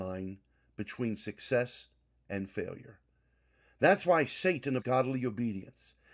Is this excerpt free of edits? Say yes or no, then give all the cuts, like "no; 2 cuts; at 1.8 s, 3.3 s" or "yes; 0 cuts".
no; 1 cut; at 4.8 s